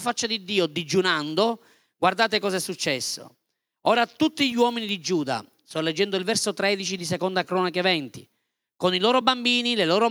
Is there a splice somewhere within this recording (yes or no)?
no